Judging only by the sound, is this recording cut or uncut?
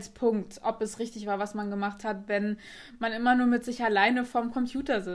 uncut